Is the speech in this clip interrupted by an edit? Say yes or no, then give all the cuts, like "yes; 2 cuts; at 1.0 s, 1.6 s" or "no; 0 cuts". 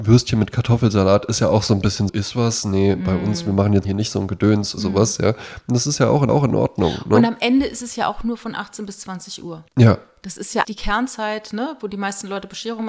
yes; 6 cuts; at 2.1 s, 3.8 s, 4.8 s, 6.3 s, 9.7 s, 10.6 s